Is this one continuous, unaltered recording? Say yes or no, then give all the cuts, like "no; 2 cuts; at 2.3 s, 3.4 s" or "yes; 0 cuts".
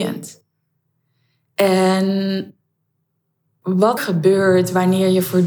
no; 1 cut; at 4.0 s